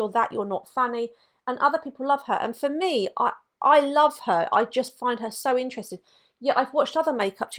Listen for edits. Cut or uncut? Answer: uncut